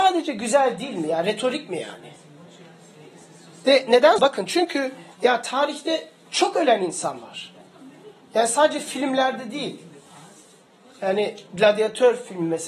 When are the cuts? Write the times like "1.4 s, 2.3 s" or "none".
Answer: 4.2 s